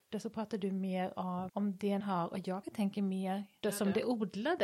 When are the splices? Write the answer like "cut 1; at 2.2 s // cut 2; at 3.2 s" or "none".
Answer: cut 1; at 1.5 s // cut 2; at 2.0 s // cut 3; at 2.6 s // cut 4; at 3.6 s